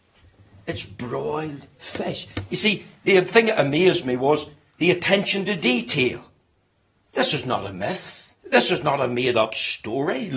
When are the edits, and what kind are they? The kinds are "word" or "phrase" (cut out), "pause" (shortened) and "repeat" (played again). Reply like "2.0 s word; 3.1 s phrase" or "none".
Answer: 8.4 s pause